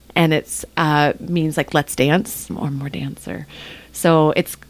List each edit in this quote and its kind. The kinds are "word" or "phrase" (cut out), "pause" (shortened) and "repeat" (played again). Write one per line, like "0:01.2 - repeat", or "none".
0:02.5 - word